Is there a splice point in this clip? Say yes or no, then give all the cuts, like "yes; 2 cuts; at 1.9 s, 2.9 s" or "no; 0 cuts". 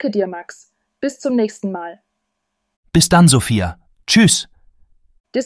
no; 0 cuts